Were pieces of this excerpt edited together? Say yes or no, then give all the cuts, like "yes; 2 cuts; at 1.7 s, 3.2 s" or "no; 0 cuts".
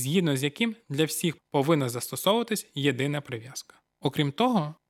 yes; 1 cut; at 1.4 s